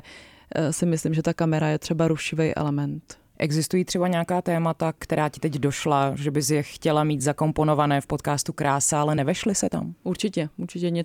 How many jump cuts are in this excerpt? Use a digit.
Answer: 0